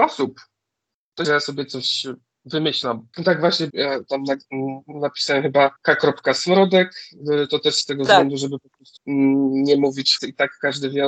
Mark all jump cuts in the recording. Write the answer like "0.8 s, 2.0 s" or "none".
1.2 s, 3.1 s, 3.7 s, 4.8 s, 5.8 s, 9.0 s, 10.2 s